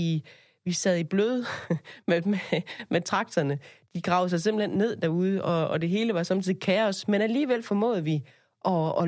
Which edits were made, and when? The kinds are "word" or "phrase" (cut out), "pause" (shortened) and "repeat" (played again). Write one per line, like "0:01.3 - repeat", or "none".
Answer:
none